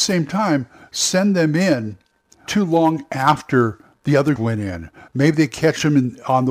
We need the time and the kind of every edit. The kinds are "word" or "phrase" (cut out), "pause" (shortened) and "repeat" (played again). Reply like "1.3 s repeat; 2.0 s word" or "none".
2.5 s word; 4.4 s word

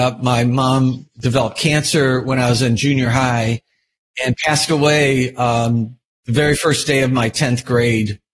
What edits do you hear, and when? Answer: none

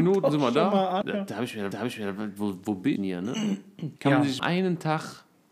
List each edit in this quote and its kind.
1.0 s word; 1.7 s repeat; 3.0 s word; 4.0 s pause; 4.4 s word

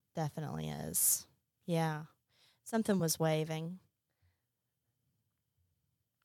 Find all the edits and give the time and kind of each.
none

